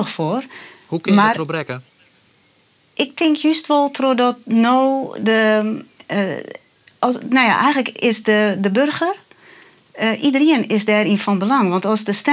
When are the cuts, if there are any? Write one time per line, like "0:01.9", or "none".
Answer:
none